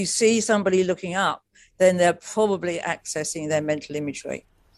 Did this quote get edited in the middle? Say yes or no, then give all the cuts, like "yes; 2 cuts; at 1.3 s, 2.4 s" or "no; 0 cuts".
no; 0 cuts